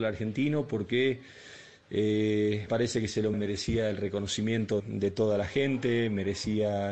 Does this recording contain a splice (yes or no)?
yes